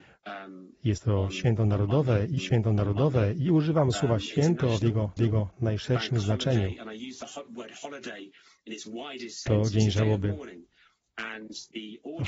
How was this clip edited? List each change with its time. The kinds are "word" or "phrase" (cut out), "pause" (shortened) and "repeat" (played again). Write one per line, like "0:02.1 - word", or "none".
0:02.4 - repeat
0:05.2 - repeat